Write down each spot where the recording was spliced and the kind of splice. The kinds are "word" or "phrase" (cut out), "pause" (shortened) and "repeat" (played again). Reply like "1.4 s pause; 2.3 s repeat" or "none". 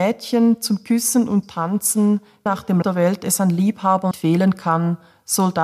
1.4 s word; 2.5 s word; 2.8 s word; 4.1 s word